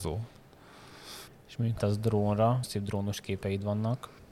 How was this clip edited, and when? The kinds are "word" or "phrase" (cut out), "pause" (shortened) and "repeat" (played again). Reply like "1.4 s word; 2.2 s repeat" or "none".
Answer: 1.3 s pause; 1.8 s word; 2.6 s phrase

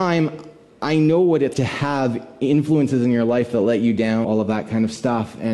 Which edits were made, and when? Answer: 1.5 s word; 4.2 s phrase

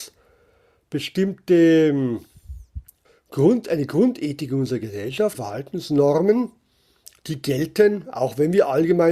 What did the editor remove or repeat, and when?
3.0 s pause; 5.3 s phrase

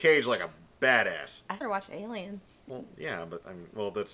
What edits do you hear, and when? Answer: 1.6 s word; 2.6 s pause

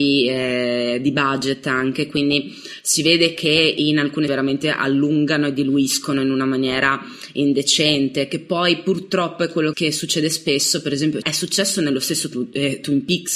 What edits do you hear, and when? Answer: 4.3 s word; 9.7 s word; 11.2 s word

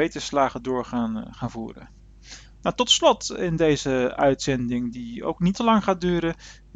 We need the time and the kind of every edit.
5.5 s word

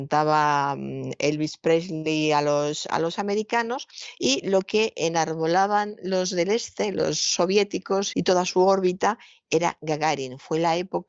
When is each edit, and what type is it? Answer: 8.1 s word

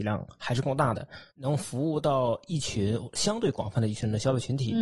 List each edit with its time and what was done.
1.3 s pause

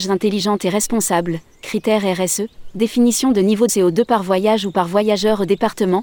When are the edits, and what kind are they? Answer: 1.6 s phrase; 3.7 s word

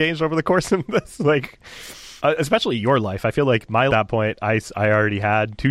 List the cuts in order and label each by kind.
2.2 s pause; 3.9 s phrase

